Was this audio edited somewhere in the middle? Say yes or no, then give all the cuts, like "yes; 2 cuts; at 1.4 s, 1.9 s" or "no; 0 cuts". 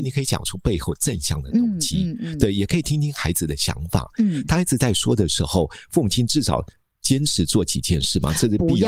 no; 0 cuts